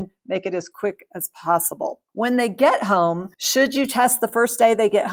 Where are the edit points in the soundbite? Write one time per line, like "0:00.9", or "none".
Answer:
0:02.1
0:03.3